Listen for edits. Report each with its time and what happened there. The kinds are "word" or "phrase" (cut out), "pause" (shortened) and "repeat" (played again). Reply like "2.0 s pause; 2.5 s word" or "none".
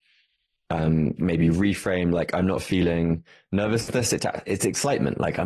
1.2 s phrase